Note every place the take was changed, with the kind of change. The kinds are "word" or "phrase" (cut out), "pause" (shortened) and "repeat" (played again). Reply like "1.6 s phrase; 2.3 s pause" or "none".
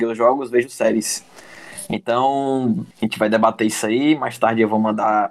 2.9 s pause

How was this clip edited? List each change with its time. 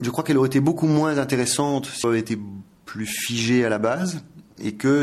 2.0 s phrase

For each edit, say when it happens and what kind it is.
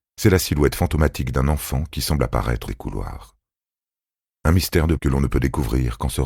2.7 s phrase; 5.0 s word

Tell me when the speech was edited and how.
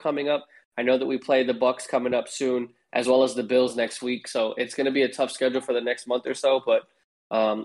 none

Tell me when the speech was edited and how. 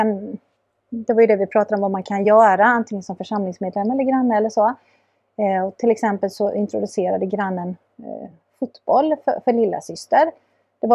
none

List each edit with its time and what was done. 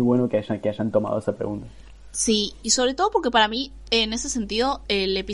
none

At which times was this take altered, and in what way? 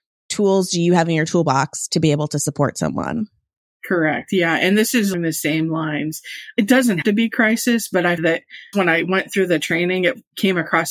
5.1 s word; 7.0 s word; 8.2 s word; 8.7 s word

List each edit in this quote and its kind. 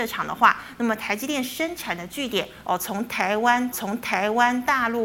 3.7 s repeat

